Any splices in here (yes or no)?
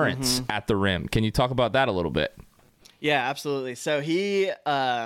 no